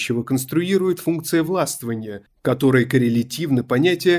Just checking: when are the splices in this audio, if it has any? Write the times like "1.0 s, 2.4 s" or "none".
none

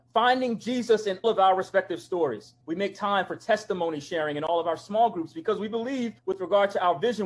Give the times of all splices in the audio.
1.2 s, 2.6 s, 6.2 s

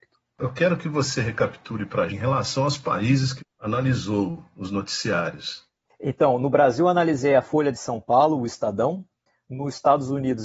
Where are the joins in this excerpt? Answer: 2.1 s, 3.4 s

